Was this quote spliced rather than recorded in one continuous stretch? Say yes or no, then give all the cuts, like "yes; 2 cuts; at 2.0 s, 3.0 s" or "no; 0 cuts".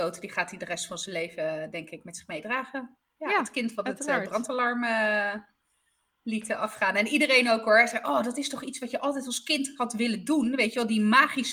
no; 0 cuts